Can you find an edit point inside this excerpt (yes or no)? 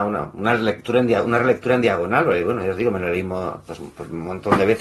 no